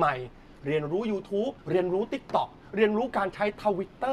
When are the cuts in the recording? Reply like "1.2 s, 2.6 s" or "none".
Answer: 1.6 s